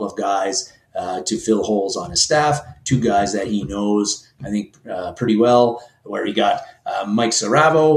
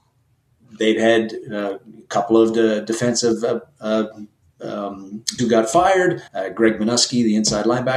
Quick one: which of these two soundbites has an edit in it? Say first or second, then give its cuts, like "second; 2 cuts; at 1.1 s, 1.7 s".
second; 2 cuts; at 5.4 s, 6.3 s